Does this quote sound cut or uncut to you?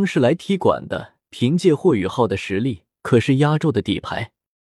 cut